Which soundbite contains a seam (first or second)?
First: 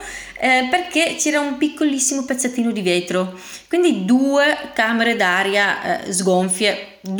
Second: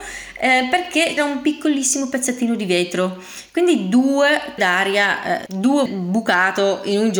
second